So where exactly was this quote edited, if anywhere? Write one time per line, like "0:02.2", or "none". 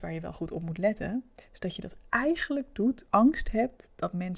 0:03.1